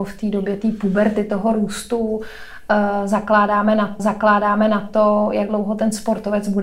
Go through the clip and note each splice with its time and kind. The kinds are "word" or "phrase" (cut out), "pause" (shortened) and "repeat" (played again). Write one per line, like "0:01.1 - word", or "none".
0:04.0 - repeat